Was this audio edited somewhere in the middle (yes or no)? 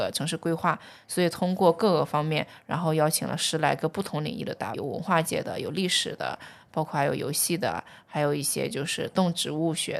yes